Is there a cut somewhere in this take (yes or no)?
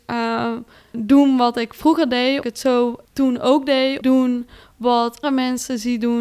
yes